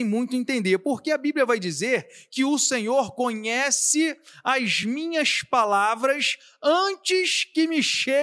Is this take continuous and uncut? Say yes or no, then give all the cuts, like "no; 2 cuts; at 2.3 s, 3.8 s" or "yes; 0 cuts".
yes; 0 cuts